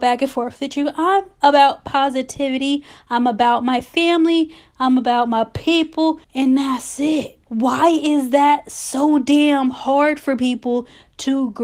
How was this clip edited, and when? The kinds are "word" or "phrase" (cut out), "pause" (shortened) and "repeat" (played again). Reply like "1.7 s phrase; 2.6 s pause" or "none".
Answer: 6.2 s pause; 7.4 s pause